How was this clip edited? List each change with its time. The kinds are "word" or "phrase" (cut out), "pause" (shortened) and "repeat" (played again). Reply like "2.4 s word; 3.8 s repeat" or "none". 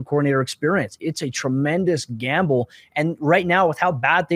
none